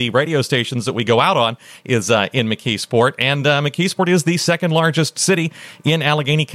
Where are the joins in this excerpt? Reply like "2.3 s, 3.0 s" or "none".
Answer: none